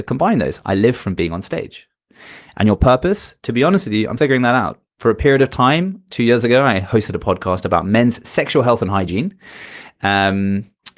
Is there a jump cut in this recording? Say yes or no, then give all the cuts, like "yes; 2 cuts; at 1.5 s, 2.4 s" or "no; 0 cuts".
yes; 2 cuts; at 4.2 s, 4.9 s